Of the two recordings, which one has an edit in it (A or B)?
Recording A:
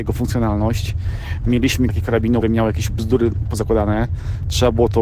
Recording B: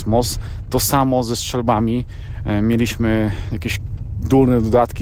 A